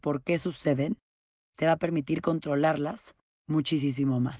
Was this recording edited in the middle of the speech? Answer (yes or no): no